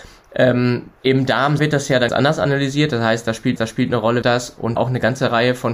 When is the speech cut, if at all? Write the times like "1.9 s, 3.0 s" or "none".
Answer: 1.0 s, 1.6 s, 2.1 s, 3.6 s, 4.2 s, 4.8 s